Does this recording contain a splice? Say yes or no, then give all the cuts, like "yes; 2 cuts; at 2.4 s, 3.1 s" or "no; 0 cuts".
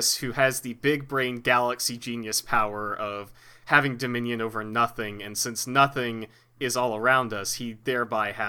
no; 0 cuts